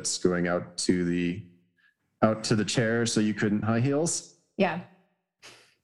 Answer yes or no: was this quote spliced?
yes